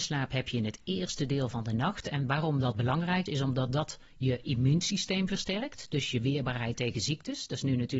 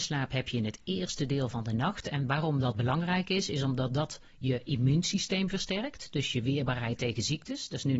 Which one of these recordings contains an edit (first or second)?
first